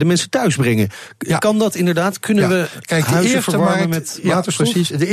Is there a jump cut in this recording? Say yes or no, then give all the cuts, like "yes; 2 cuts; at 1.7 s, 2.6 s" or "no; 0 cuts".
no; 0 cuts